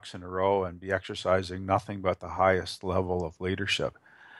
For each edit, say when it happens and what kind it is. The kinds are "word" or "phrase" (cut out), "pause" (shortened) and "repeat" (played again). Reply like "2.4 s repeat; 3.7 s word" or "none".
none